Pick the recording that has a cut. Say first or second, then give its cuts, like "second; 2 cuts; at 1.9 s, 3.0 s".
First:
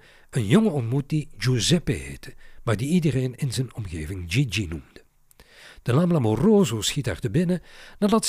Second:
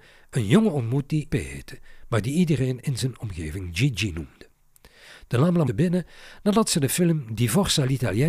second; 2 cuts; at 1.3 s, 5.7 s